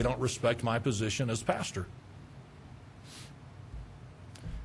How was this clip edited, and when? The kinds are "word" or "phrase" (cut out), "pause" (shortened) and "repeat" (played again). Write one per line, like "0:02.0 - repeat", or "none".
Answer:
none